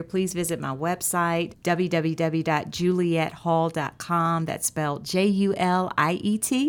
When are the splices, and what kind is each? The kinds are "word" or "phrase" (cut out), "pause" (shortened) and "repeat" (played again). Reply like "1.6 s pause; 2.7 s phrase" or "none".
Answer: 1.5 s word